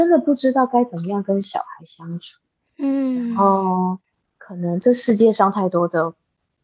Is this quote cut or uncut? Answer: cut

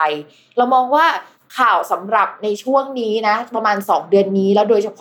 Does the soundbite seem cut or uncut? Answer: uncut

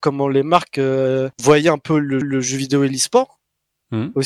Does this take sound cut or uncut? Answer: cut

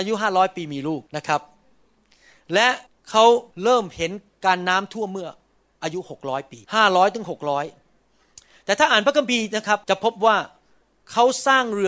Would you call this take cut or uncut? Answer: cut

